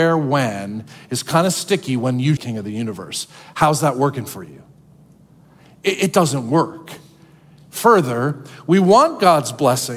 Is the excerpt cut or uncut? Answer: cut